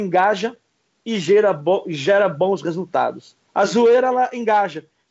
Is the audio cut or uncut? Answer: cut